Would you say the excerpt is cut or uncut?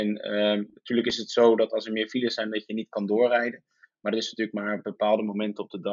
uncut